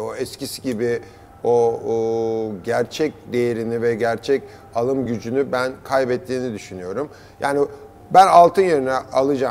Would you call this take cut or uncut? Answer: uncut